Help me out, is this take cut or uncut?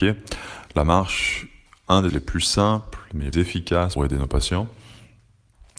cut